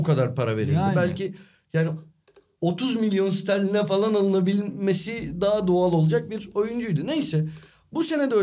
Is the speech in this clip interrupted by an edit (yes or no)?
no